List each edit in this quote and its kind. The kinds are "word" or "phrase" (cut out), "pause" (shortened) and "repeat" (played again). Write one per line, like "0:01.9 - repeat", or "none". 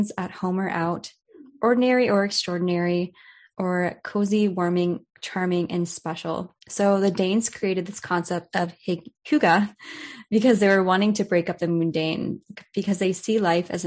0:05.2 - pause
0:06.6 - pause
0:09.2 - pause